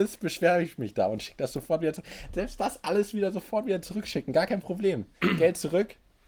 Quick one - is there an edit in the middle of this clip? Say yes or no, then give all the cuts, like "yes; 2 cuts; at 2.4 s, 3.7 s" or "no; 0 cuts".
yes; 1 cut; at 5.1 s